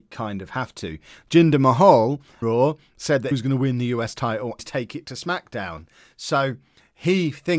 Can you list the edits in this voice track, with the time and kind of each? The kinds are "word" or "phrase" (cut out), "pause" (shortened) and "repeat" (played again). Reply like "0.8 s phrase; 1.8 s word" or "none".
2.4 s word; 3.3 s word; 4.6 s word; 5.0 s word